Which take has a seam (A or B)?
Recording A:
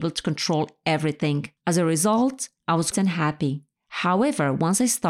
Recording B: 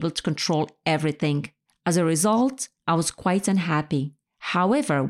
A